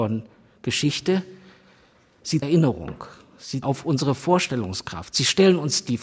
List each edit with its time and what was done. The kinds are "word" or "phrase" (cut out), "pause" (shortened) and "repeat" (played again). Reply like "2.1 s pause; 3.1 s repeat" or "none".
2.4 s phrase; 3.6 s word